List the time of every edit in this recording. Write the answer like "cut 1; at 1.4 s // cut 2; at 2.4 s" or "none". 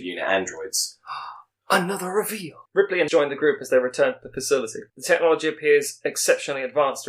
cut 1; at 2.7 s // cut 2; at 3.1 s // cut 3; at 4.9 s